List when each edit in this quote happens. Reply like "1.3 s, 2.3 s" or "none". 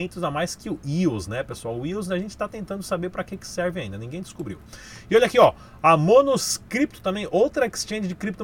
none